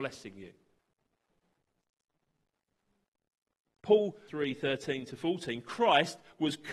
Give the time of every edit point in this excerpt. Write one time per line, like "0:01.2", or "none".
0:04.3